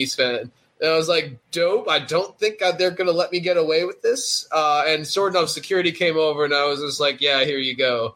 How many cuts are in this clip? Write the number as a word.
one